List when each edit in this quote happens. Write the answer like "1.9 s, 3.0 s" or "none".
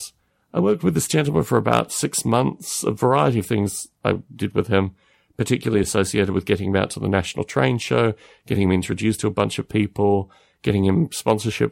none